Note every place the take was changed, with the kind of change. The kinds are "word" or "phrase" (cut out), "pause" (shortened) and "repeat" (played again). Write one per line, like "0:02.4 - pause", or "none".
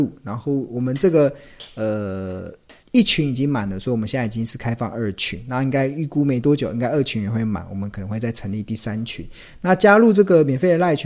0:02.8 - pause